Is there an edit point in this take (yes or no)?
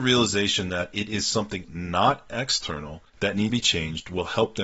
yes